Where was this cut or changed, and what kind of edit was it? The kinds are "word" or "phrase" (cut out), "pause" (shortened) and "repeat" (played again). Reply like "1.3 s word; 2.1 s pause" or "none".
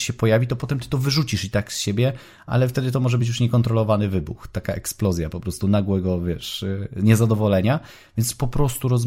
none